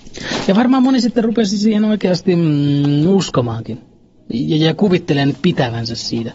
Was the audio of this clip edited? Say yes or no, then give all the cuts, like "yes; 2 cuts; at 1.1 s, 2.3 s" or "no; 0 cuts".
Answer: no; 0 cuts